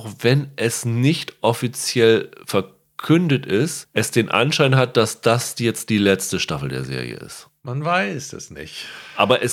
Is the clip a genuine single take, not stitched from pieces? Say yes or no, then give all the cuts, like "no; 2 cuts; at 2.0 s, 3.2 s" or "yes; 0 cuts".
yes; 0 cuts